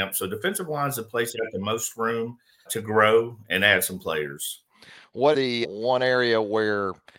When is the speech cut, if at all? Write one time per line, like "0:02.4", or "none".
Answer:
0:01.3
0:02.7
0:05.3
0:05.6